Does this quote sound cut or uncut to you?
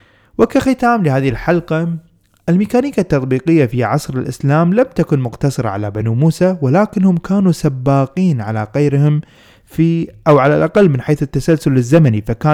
uncut